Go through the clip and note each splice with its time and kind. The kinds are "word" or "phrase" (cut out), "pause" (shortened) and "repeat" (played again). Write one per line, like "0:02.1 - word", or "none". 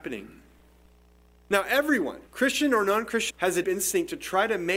0:02.3 - pause
0:03.3 - word
0:03.6 - word